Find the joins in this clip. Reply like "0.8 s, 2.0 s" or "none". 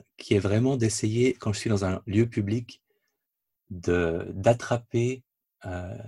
none